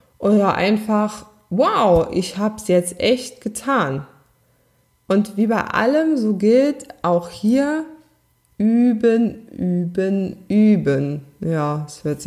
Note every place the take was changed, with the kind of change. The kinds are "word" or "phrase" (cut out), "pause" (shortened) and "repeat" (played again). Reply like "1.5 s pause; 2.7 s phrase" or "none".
none